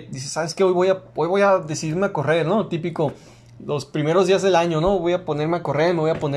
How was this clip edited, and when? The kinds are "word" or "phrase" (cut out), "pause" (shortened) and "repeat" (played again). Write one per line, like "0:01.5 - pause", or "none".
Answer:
none